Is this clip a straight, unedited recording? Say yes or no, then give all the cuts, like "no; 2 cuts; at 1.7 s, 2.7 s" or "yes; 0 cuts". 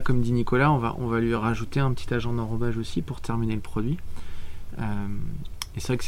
yes; 0 cuts